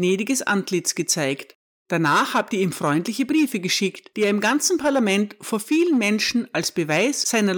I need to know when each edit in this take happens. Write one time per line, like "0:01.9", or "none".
0:01.6